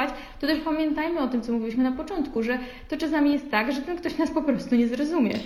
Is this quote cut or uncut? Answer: uncut